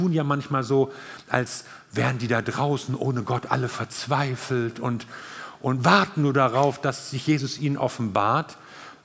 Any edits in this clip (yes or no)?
no